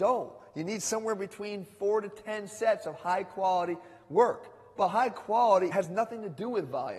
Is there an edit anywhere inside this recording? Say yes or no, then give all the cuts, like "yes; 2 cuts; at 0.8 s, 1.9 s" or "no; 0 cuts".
no; 0 cuts